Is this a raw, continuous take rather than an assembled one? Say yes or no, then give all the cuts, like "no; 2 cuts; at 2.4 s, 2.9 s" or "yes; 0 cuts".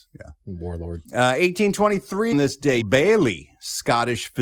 no; 3 cuts; at 1.0 s, 2.3 s, 2.8 s